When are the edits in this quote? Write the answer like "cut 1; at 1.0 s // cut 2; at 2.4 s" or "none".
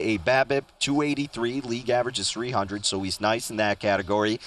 none